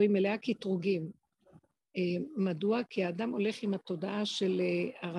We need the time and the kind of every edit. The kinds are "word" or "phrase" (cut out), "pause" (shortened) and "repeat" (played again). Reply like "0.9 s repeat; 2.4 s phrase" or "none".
none